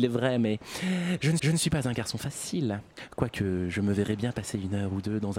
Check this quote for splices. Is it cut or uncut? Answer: cut